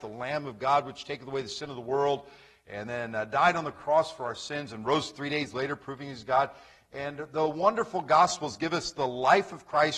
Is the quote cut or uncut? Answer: uncut